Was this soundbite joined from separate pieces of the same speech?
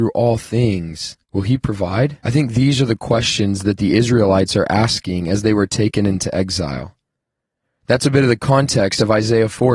yes; 2 cuts; at 1.2 s, 2.2 s

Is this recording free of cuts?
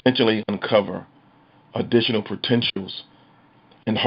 yes; 0 cuts

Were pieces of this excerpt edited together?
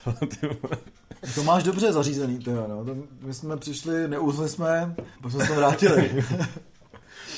yes; 1 cut; at 5.2 s

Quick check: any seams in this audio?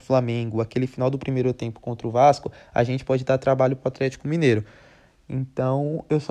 no; 0 cuts

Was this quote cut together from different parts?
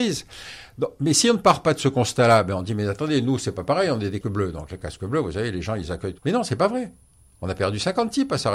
yes; 2 cuts; at 4.2 s, 6.2 s

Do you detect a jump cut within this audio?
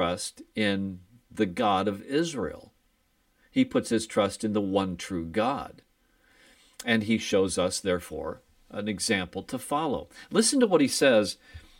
no; 0 cuts

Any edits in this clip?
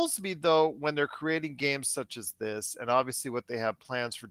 no; 0 cuts

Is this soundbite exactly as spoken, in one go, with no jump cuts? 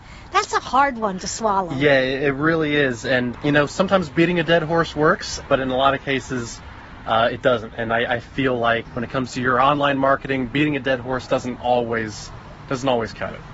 yes; 0 cuts

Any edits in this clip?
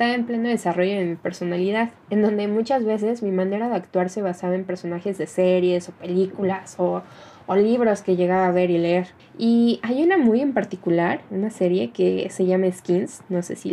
yes; 1 cut; at 9.2 s

